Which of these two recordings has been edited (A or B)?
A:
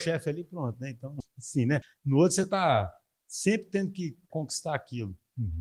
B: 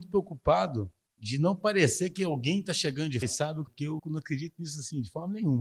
B